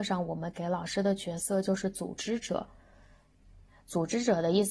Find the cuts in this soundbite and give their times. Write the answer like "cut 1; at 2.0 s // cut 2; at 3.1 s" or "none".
none